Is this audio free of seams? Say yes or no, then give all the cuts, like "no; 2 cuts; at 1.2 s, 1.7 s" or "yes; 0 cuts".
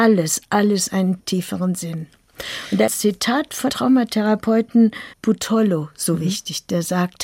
no; 4 cuts; at 1.2 s, 2.9 s, 3.7 s, 5.1 s